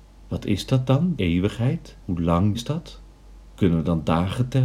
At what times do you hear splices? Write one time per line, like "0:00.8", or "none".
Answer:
0:01.2
0:02.0
0:02.5
0:03.5